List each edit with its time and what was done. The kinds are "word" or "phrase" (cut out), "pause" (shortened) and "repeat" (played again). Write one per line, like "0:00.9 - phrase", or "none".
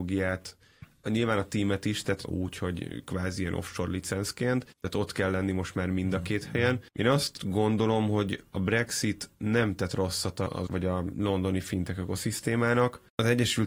0:02.2 - phrase
0:04.7 - pause
0:10.7 - word